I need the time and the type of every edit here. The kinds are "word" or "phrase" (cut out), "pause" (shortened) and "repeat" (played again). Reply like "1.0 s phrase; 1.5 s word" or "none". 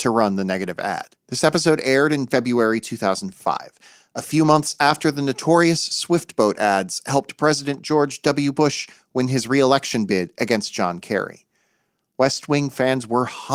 1.2 s pause